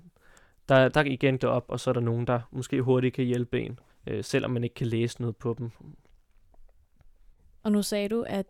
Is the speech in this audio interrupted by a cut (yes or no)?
yes